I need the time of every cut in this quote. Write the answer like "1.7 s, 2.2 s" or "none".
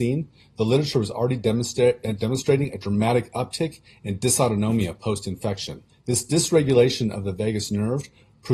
5.9 s